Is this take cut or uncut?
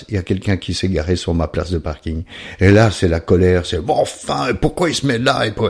uncut